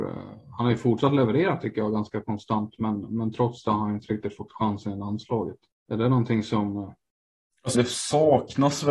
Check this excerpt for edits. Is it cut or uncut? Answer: cut